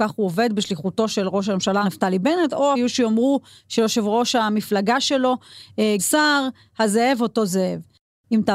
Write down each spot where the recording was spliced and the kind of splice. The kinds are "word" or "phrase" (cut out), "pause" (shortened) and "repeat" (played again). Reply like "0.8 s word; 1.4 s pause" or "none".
1.8 s word; 2.7 s word; 6.0 s word